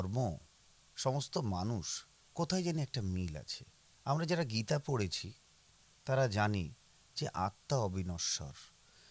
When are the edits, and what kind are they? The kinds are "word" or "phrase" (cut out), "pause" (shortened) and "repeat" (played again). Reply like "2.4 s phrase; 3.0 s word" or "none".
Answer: 2.1 s pause